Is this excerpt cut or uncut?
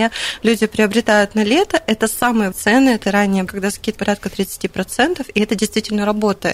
cut